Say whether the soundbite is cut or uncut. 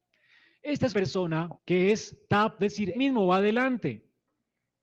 cut